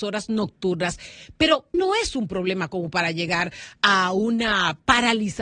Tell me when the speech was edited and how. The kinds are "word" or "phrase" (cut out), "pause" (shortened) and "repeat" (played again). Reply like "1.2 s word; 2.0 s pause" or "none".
1.7 s word